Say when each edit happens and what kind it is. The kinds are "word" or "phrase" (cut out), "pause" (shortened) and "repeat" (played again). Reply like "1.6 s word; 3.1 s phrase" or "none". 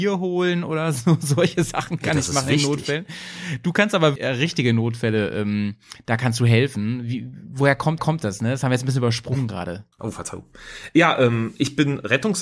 4.2 s word; 8.0 s repeat; 9.9 s pause